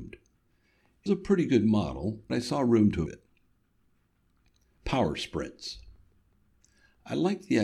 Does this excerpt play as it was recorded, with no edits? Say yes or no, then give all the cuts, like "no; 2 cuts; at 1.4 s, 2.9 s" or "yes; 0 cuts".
no; 3 cuts; at 1.1 s, 2.3 s, 3.1 s